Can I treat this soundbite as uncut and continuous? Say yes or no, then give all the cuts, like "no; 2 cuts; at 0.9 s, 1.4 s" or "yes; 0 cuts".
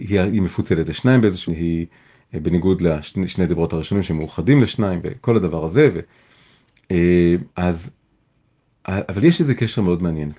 no; 2 cuts; at 1.5 s, 7.5 s